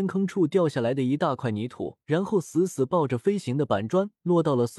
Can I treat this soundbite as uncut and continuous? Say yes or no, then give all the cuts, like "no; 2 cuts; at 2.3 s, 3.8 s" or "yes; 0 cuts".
no; 1 cut; at 2.0 s